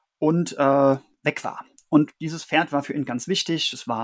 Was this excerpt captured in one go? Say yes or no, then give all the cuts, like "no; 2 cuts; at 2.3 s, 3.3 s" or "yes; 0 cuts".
yes; 0 cuts